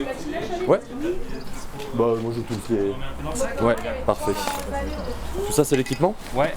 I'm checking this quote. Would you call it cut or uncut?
cut